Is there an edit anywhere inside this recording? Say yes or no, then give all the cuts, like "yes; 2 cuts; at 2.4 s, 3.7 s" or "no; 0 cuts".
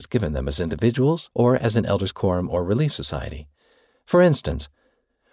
yes; 1 cut; at 1.3 s